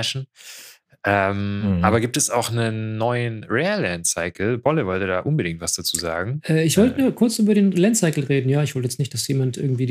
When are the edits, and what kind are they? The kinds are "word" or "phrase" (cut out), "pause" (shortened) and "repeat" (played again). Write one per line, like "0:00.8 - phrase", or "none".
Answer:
none

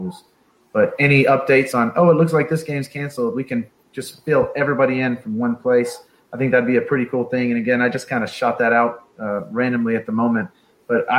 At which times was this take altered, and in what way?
none

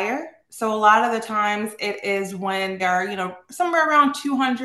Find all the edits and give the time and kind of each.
0:02.8 - word

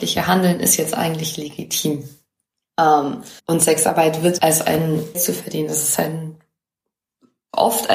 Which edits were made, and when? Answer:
0:03.4 - pause
0:04.4 - phrase
0:05.1 - phrase

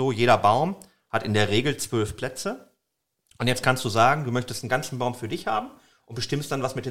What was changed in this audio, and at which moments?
none

